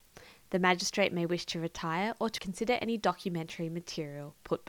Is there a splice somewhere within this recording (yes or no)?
yes